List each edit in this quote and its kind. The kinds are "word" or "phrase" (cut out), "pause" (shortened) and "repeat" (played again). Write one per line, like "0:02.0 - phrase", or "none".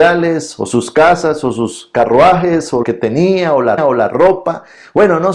0:02.8 - word
0:03.8 - repeat